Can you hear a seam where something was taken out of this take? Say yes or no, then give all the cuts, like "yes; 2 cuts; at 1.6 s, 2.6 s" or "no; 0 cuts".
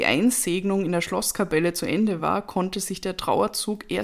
no; 0 cuts